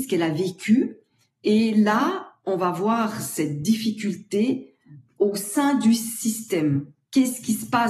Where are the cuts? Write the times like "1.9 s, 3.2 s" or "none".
none